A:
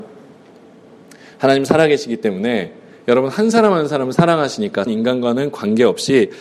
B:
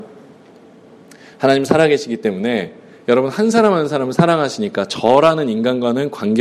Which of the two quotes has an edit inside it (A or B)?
A